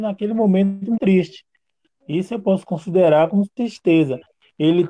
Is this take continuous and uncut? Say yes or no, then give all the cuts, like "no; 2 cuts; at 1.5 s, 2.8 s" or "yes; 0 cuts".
no; 1 cut; at 1.0 s